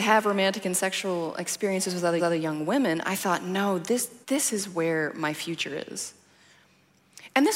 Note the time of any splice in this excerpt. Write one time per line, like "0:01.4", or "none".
0:02.2
0:04.2